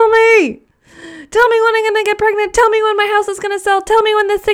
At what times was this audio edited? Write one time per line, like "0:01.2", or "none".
none